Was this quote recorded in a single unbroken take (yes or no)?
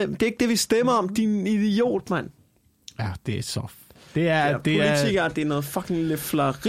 yes